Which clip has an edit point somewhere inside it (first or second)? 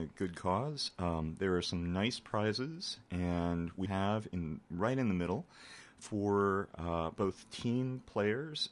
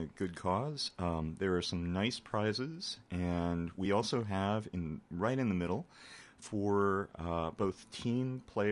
first